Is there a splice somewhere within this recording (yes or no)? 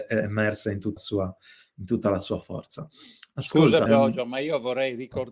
yes